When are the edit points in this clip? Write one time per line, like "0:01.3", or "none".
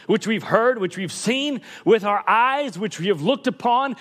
none